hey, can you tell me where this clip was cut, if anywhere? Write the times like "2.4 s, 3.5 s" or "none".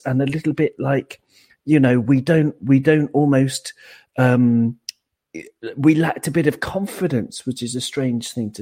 none